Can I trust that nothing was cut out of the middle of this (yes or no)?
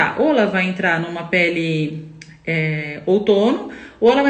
yes